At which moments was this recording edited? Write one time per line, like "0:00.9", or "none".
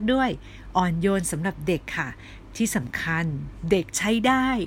none

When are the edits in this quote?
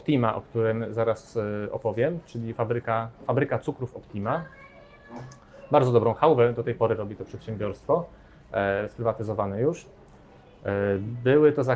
none

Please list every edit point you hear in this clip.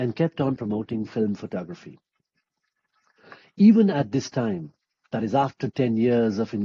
none

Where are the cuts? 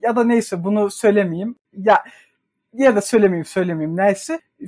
none

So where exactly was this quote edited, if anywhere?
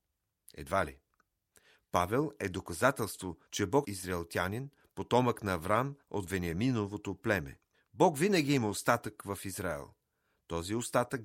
0:03.5
0:03.8
0:06.0
0:07.7

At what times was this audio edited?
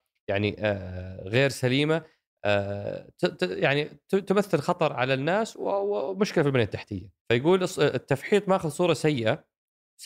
0:07.2

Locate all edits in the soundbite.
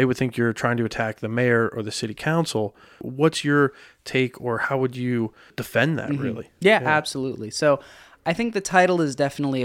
none

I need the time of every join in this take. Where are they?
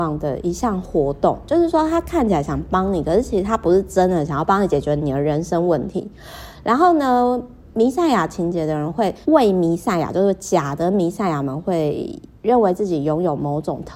0:09.2

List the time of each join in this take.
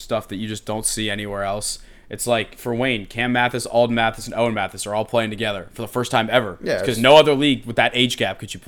none

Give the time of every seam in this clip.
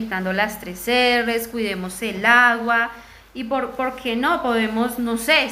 none

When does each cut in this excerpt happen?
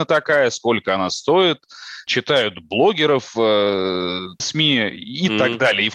0:02.1
0:04.4

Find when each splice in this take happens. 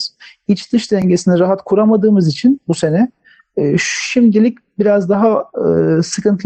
none

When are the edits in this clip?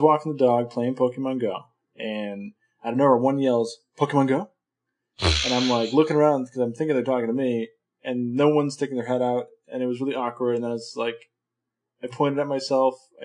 none

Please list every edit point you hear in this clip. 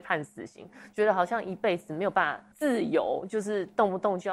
0:02.5

